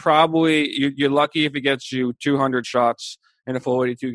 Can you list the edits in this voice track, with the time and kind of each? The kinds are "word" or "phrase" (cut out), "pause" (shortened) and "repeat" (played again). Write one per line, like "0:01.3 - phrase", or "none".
none